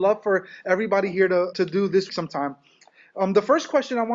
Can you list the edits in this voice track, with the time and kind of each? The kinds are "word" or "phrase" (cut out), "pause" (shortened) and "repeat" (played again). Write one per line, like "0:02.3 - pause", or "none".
0:01.5 - word
0:02.1 - word